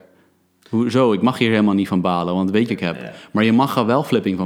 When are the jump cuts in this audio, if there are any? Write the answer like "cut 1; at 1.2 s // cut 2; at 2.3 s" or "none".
cut 1; at 2.7 s